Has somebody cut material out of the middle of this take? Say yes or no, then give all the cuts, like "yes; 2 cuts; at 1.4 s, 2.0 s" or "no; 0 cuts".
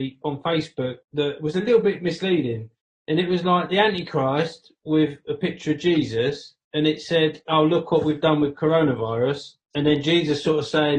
yes; 4 cuts; at 1.0 s, 2.8 s, 6.6 s, 9.6 s